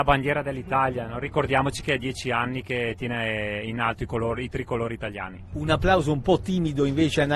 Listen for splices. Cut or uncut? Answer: uncut